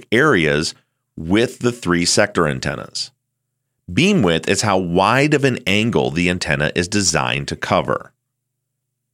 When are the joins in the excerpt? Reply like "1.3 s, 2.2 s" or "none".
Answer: none